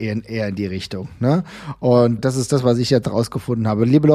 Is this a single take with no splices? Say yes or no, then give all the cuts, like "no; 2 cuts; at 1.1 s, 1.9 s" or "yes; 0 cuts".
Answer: no; 1 cut; at 2.2 s